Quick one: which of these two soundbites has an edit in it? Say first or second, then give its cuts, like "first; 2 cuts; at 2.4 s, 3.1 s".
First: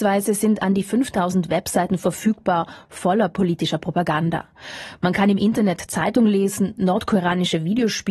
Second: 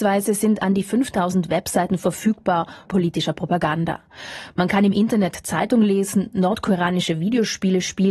second; 1 cut; at 2.8 s